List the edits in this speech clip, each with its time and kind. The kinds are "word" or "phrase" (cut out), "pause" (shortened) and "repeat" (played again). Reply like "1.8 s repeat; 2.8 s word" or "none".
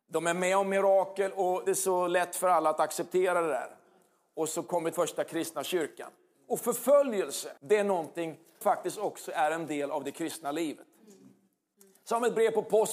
1.7 s phrase; 4.9 s phrase; 7.6 s pause; 8.6 s word